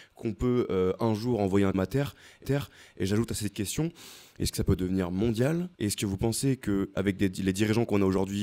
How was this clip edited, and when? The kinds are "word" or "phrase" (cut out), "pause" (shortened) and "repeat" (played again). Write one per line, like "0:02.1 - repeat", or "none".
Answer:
0:01.7 - word
0:02.4 - repeat
0:04.5 - phrase
0:05.7 - pause
0:06.9 - word